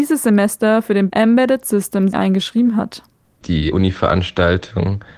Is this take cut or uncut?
cut